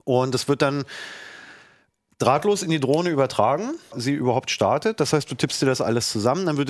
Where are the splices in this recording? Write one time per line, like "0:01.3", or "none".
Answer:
0:03.9